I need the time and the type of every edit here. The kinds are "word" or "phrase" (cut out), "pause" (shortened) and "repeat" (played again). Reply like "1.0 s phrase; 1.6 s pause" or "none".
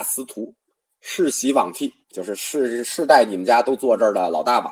2.0 s pause